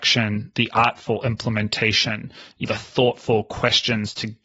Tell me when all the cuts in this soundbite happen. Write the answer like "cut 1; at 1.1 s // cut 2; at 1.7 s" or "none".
cut 1; at 2.6 s